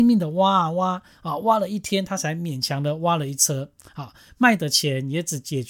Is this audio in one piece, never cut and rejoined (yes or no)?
yes